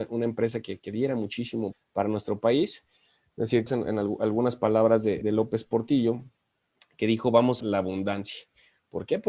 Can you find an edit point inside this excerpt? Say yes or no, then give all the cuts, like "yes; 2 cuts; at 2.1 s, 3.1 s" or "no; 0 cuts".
yes; 4 cuts; at 1.7 s, 3.7 s, 5.2 s, 7.6 s